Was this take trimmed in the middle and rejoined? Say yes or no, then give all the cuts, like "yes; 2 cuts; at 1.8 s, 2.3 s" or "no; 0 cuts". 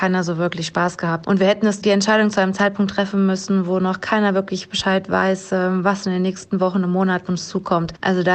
yes; 1 cut; at 7.3 s